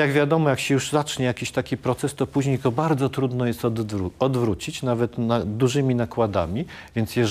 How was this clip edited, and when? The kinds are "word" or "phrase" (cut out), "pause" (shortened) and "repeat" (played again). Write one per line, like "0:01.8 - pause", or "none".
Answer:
none

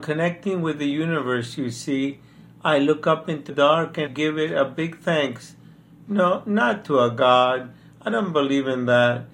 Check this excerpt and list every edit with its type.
0:03.5 - word
0:04.1 - word

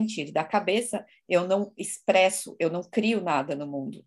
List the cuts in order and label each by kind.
none

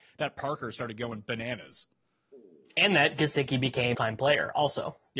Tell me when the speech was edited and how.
0:03.9 - phrase

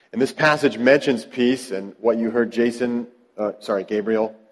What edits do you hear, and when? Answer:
none

